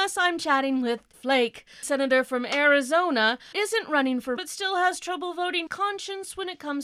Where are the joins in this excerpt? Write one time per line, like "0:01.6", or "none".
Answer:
0:01.1
0:01.8
0:03.5
0:04.4
0:05.7

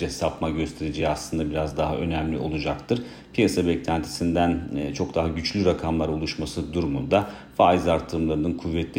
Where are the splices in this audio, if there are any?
none

